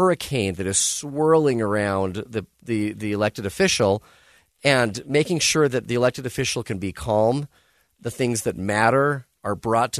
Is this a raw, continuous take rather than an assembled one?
yes; 0 cuts

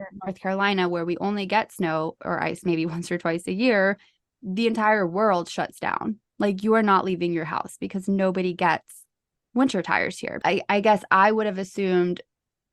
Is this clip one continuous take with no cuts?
yes; 0 cuts

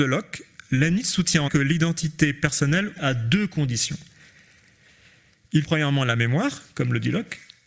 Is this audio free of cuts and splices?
no; 3 cuts; at 1.5 s, 3.0 s, 5.6 s

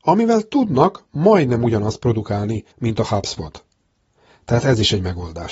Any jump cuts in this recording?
yes; 1 cut; at 2.7 s

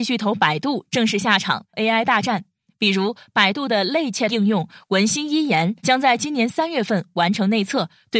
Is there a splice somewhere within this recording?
yes; 3 cuts; at 1.7 s, 4.3 s, 5.8 s

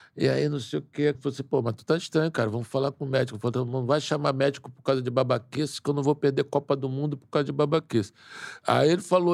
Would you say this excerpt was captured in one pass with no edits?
no; 1 cut; at 1.1 s

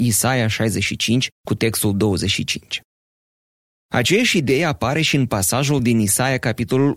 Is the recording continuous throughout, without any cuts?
no; 1 cut; at 1.4 s

